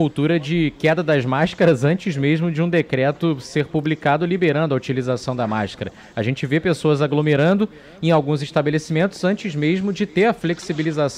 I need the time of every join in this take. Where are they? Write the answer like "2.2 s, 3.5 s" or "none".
none